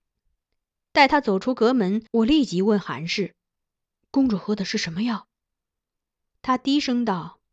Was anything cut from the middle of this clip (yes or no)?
yes